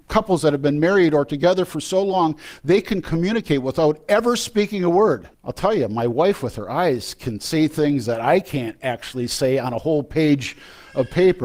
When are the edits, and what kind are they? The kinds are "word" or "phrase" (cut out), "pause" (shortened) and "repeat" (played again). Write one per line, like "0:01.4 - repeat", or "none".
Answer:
0:05.3 - pause